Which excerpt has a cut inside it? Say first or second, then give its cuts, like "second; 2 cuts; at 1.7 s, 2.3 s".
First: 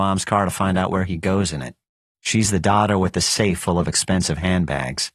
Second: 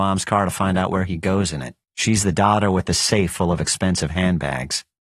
second; 1 cut; at 1.8 s